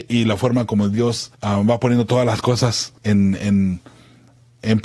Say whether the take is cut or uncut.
cut